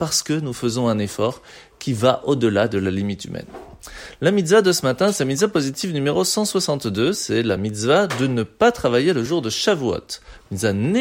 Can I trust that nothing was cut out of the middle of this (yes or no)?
yes